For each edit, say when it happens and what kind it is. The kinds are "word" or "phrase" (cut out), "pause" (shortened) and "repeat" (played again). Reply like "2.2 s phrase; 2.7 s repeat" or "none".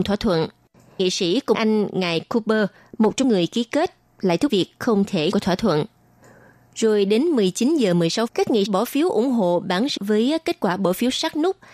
1.0 s word; 1.5 s word; 3.2 s word; 4.5 s word; 5.3 s word; 8.3 s word; 8.7 s word; 10.0 s word